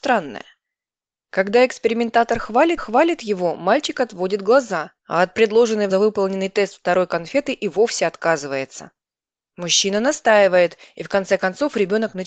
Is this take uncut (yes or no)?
no